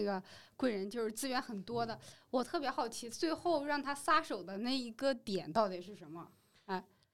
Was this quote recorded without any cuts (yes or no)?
yes